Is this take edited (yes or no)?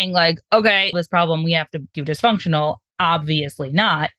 yes